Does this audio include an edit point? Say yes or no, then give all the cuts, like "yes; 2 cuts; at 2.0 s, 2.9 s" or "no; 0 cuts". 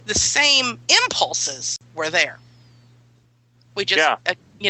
no; 0 cuts